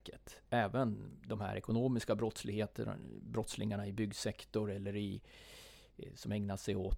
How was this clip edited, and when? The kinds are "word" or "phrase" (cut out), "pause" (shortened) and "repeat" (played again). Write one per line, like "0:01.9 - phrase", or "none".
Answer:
none

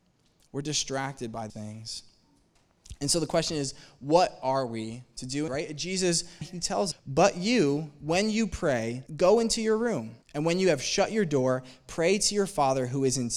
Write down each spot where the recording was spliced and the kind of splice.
0:01.5 - word
0:05.5 - word
0:06.4 - word
0:06.9 - phrase
0:09.1 - pause
0:10.2 - pause

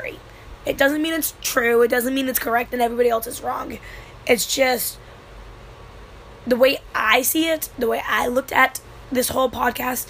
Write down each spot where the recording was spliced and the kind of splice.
none

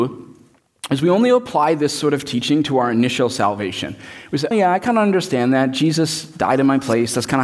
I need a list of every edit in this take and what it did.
0:04.5 - word

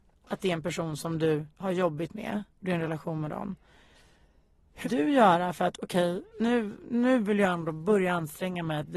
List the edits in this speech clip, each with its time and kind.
0:01.5 - pause
0:02.5 - pause
0:04.8 - word
0:06.3 - pause

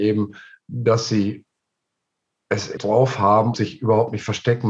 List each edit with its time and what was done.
0:02.8 - word
0:03.5 - word

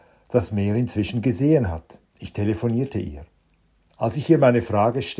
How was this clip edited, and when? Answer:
0:02.1 - pause

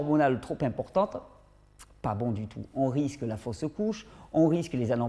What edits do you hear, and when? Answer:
none

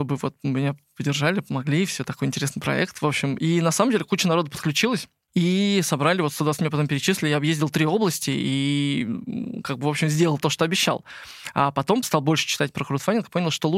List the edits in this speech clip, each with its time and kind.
0:06.6 - word

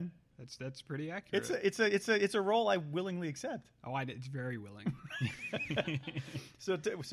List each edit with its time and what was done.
0:02.0 - repeat

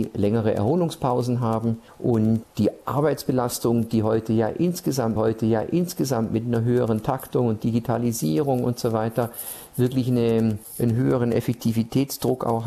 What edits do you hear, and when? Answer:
0:05.2 - repeat

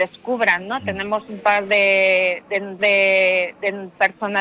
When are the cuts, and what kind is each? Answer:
0:02.8 - repeat

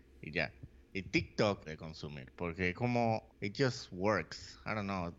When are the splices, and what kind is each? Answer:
0:01.7 - phrase
0:03.3 - pause

